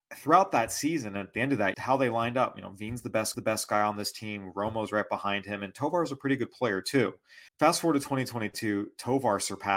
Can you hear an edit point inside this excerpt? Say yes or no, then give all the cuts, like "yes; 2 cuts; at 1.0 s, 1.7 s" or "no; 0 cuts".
yes; 3 cuts; at 1.7 s, 3.3 s, 7.5 s